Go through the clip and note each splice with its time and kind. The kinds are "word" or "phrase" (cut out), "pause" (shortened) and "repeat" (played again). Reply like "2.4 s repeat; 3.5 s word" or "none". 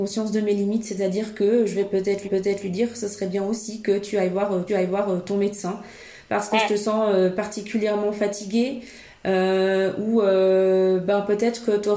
2.2 s repeat; 4.7 s repeat

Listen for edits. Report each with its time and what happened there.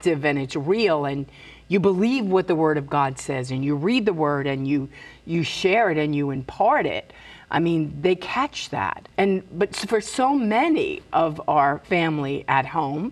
9.1 s pause; 11.8 s pause

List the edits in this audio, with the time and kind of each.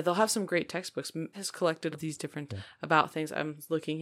1.3 s word; 1.9 s word; 2.5 s word

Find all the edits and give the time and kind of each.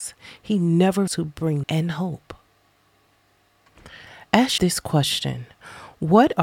1.1 s word; 1.6 s word; 4.6 s word

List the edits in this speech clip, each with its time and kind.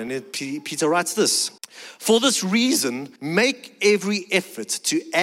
1.6 s pause; 3.2 s pause

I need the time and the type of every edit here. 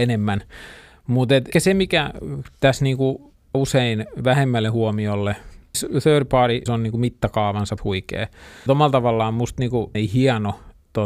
1.5 s word; 3.5 s word; 5.7 s word; 6.7 s word; 7.8 s word; 8.7 s word; 9.9 s word

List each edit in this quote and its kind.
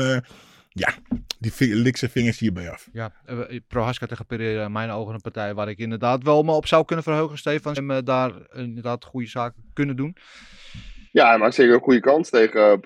7.8 s phrase; 11.1 s pause

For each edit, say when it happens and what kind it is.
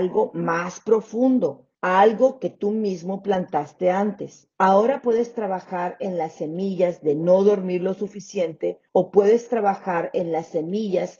1.7 s pause; 4.5 s pause; 8.9 s pause

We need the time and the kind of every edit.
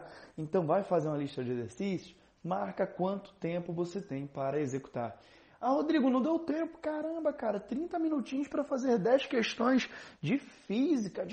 none

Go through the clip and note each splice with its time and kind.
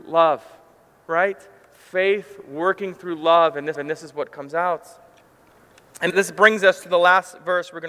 3.7 s repeat; 6.1 s word

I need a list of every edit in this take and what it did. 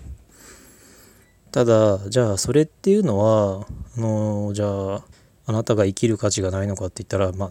5.1 s pause

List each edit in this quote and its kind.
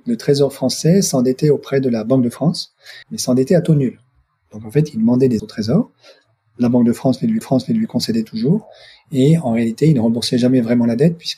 3.0 s pause; 5.4 s word; 7.4 s repeat

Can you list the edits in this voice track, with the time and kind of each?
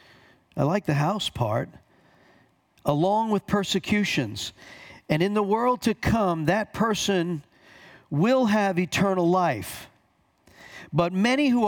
none

